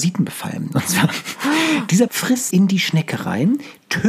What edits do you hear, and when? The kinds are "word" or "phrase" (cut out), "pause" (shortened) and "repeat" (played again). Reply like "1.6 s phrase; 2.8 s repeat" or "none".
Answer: 2.1 s word; 2.5 s word